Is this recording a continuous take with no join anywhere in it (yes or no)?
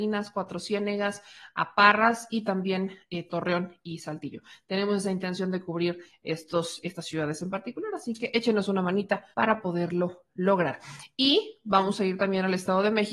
no